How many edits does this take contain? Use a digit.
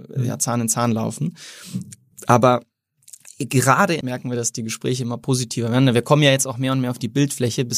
1